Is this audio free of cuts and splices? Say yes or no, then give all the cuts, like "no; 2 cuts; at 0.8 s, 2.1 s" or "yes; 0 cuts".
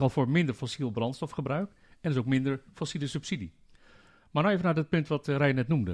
yes; 0 cuts